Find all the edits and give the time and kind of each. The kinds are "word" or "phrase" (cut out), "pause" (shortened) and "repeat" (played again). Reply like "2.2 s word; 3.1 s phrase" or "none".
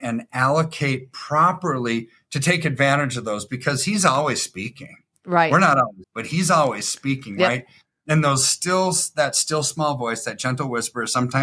6.0 s word

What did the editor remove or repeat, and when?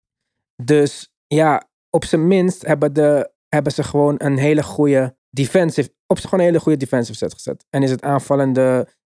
1.2 s pause; 3.4 s pause; 5.2 s pause; 6.2 s phrase

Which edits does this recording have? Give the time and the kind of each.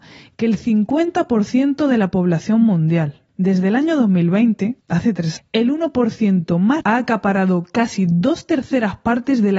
3.3 s pause; 4.8 s pause; 5.4 s word; 6.8 s word

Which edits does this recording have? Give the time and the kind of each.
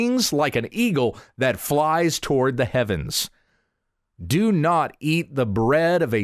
none

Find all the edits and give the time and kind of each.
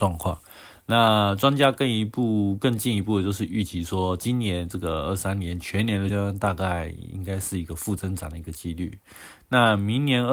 6.1 s word

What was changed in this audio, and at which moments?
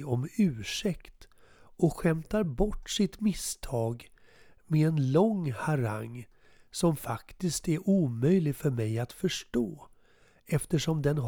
none

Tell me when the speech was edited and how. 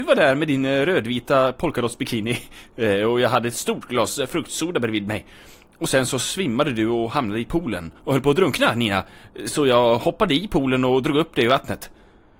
none

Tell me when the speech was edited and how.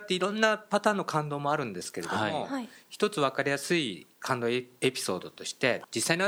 4.1 s pause

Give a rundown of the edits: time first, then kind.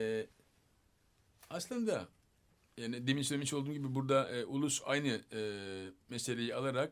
2.5 s pause

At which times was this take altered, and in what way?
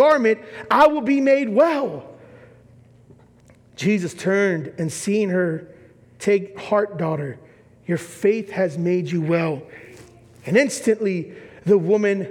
none

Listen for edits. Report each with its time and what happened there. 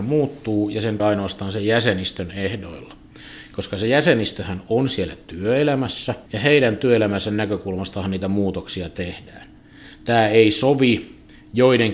1.0 s phrase; 6.3 s pause

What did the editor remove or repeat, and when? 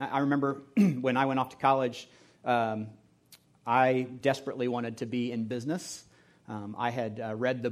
none

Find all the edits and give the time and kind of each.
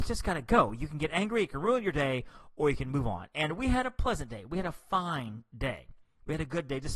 none

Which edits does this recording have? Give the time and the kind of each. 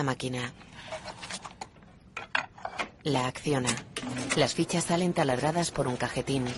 3.0 s pause

